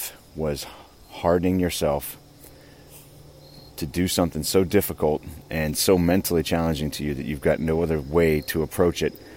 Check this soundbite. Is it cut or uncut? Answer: uncut